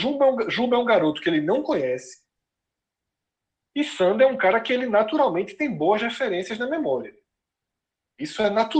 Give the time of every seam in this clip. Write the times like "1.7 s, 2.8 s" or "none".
none